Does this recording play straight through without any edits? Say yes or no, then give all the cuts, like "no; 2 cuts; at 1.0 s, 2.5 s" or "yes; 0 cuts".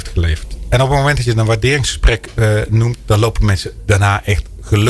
yes; 0 cuts